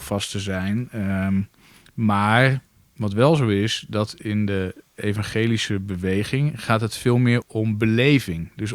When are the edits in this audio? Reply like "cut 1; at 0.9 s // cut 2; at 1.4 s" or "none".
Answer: cut 1; at 7.4 s